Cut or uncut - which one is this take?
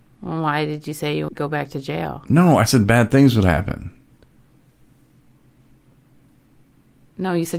cut